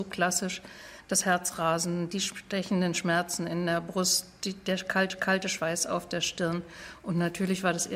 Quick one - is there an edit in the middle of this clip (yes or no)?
yes